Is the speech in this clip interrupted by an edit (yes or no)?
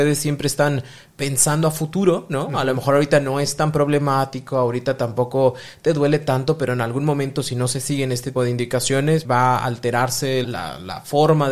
yes